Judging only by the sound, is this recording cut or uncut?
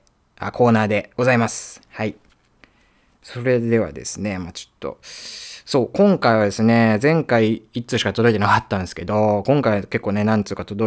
uncut